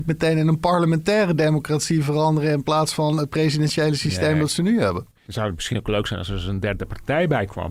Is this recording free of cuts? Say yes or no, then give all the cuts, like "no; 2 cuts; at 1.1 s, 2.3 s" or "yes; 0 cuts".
no; 1 cut; at 5.2 s